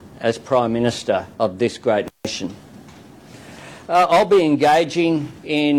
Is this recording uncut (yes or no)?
no